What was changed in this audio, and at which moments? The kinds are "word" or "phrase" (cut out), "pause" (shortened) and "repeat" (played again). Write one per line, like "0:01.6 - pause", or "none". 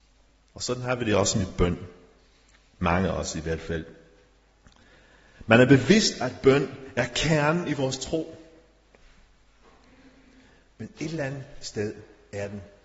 none

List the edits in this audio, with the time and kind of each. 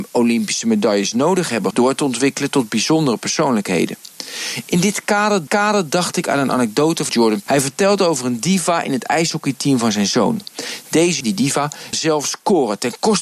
0:01.7 - phrase
0:05.5 - repeat
0:07.1 - phrase
0:07.5 - word
0:11.2 - word
0:11.9 - word

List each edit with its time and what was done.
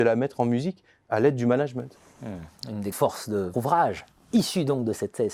0:02.9 - word
0:03.5 - word

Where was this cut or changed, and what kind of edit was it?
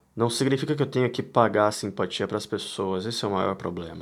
none

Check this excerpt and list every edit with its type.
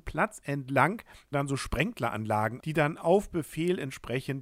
0:01.3 - word
0:02.6 - word

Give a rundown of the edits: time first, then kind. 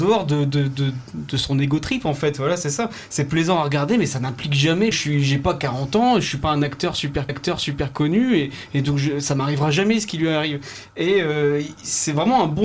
0:04.9 - phrase
0:07.3 - repeat

